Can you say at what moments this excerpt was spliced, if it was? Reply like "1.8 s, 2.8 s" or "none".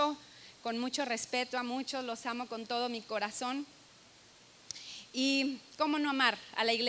none